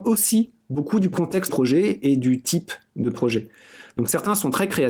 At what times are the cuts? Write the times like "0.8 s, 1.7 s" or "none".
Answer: 1.5 s